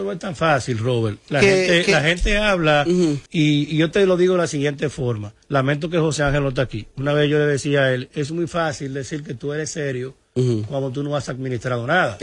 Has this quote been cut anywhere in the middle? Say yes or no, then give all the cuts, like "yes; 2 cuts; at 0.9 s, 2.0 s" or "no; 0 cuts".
yes; 2 cuts; at 3.3 s, 5.4 s